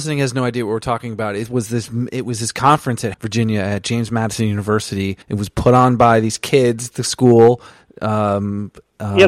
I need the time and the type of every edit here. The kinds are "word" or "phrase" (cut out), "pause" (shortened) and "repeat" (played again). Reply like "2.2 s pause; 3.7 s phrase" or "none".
3.1 s word; 5.2 s pause